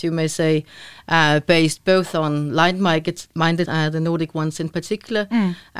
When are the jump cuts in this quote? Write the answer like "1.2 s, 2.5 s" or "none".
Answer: 3.7 s